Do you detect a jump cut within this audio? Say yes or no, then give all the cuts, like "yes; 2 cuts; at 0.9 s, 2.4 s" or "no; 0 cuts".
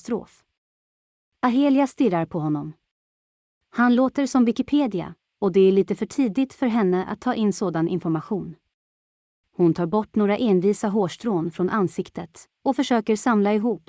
no; 0 cuts